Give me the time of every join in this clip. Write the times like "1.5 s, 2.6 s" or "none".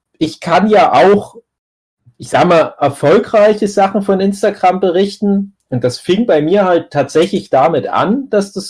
none